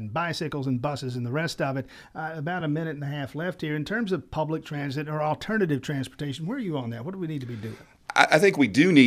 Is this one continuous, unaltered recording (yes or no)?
yes